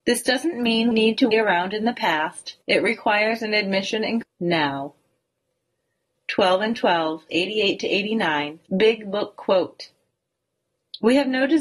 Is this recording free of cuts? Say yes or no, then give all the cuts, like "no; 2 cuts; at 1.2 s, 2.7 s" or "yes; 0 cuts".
no; 6 cuts; at 0.9 s, 1.3 s, 2.6 s, 4.2 s, 7.3 s, 8.7 s